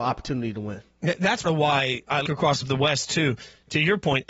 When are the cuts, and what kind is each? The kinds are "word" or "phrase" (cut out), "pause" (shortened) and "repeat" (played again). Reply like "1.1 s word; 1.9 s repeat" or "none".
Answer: 1.4 s word; 2.2 s word; 2.6 s word